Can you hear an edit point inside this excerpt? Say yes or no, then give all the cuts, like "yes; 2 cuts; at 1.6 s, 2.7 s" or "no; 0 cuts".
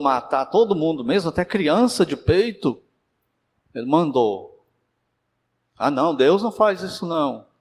no; 0 cuts